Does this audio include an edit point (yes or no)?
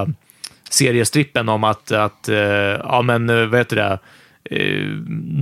no